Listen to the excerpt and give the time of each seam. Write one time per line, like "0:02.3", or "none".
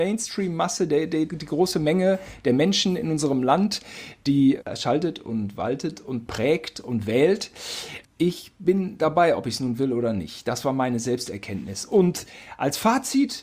0:01.3
0:08.0